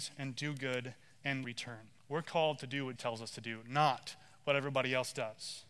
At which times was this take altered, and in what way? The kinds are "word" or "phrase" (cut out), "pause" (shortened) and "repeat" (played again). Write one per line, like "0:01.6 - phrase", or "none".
0:01.4 - phrase
0:02.0 - pause
0:03.0 - word

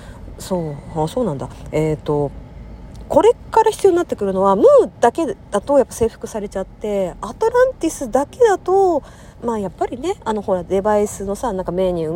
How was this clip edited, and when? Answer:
0:09.3 - pause

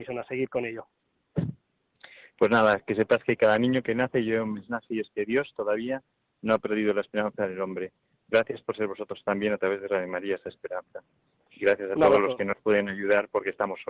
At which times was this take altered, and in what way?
none

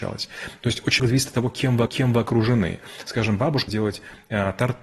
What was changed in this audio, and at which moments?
0:01.0 - word
0:01.9 - repeat
0:03.7 - phrase

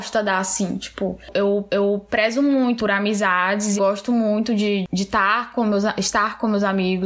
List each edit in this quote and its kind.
0:01.7 - repeat
0:02.8 - word
0:03.8 - word

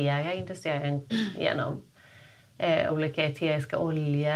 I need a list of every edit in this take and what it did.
0:01.1 - word
0:02.9 - word

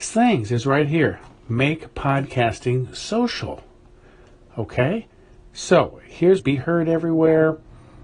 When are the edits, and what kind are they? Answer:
0:06.4 - phrase

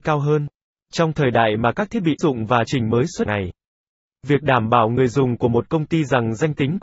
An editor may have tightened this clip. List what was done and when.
0:02.2 - word
0:02.7 - word
0:03.3 - phrase

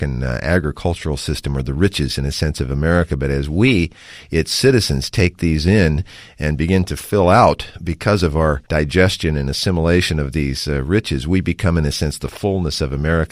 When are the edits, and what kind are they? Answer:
0:08.7 - pause

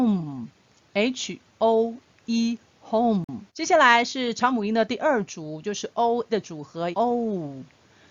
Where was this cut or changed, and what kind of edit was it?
0:02.2 - word
0:03.5 - pause
0:06.3 - word
0:06.9 - phrase

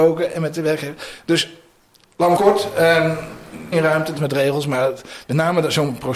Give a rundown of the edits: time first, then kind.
0:02.4 - word
0:03.7 - phrase
0:04.2 - phrase

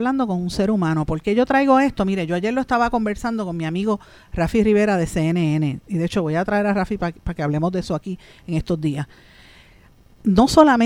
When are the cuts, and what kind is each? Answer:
none

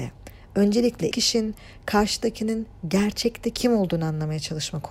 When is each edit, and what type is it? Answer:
0:01.1 - word

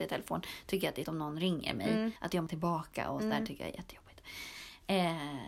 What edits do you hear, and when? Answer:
0:01.0 - word
0:02.2 - pause
0:02.5 - phrase

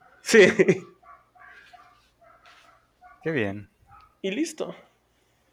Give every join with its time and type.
0:03.2 - word

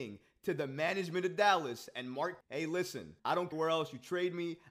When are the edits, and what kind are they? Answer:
0:02.4 - word
0:03.2 - pause
0:03.5 - word

